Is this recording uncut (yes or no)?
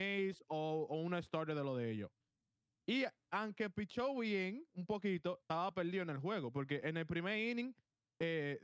yes